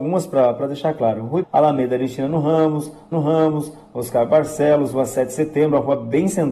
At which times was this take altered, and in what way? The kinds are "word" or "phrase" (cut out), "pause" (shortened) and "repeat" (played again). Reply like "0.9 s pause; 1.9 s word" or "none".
1.4 s word; 3.1 s repeat